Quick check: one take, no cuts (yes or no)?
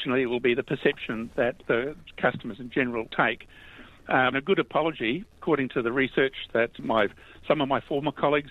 no